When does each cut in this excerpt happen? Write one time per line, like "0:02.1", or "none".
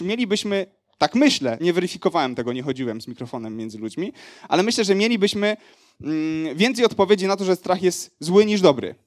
0:01.6